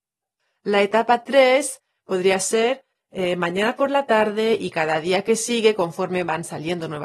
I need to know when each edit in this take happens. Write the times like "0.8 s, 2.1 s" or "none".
none